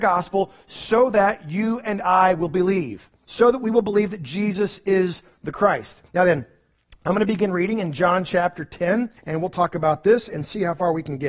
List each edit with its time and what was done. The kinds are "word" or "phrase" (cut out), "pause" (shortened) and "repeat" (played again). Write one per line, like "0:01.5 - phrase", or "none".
0:03.2 - pause
0:06.1 - pause
0:09.2 - pause